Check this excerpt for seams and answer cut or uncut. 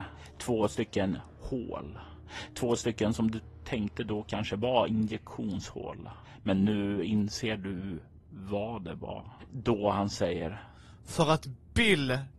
uncut